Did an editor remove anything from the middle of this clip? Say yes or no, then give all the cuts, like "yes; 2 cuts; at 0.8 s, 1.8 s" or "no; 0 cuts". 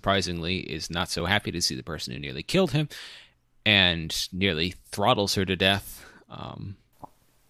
no; 0 cuts